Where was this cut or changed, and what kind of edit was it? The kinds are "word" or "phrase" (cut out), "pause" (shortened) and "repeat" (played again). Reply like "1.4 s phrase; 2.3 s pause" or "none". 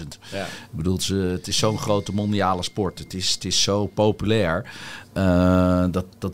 none